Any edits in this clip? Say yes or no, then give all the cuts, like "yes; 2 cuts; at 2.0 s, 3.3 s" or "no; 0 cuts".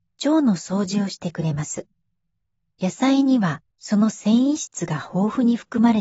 yes; 2 cuts; at 2.3 s, 3.7 s